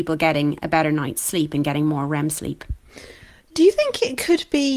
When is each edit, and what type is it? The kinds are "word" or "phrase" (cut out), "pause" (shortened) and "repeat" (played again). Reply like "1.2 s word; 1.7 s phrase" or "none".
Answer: none

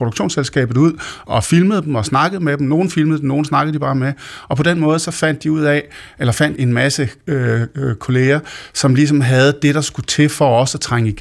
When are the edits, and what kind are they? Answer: 1.3 s word; 6.6 s phrase

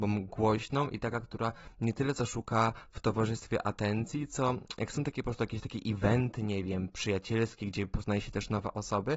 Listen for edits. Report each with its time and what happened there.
none

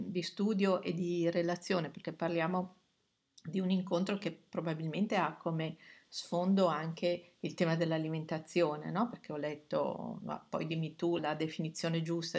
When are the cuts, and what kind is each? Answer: 11.2 s word

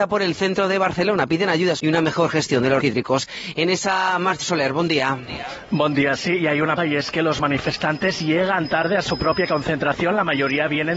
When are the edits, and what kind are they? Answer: 1.8 s word; 2.8 s word; 4.4 s word; 6.8 s word

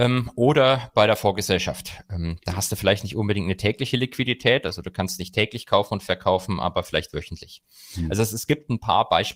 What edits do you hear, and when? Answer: none

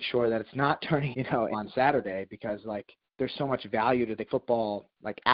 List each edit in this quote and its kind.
1.1 s word; 1.5 s word; 3.1 s pause; 4.3 s word

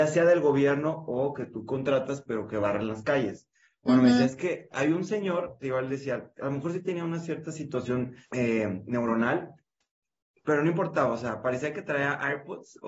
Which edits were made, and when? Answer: 8.2 s pause

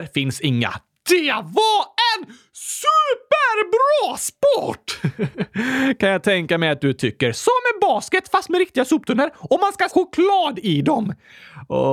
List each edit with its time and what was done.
9.9 s word

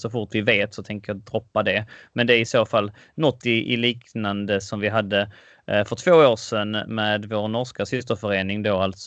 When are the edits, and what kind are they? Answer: none

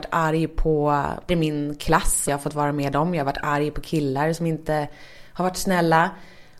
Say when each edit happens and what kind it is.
1.3 s word; 2.3 s phrase

